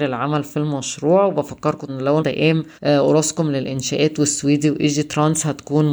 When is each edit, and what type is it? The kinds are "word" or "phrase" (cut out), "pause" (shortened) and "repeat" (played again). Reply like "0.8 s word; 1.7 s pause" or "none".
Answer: 1.9 s word; 2.2 s word; 2.7 s pause